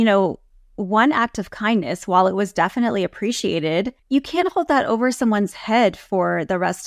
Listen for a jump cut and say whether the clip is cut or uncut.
cut